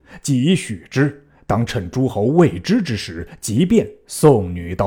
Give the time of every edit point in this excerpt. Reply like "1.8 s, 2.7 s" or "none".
none